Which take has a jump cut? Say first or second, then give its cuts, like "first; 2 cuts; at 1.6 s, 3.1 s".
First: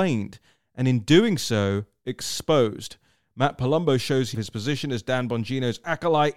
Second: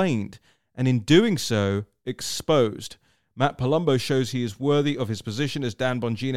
first; 1 cut; at 4.3 s